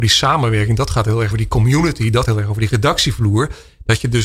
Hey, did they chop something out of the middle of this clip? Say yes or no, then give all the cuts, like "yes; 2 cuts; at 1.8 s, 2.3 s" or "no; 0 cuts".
yes; 2 cuts; at 1.3 s, 2.2 s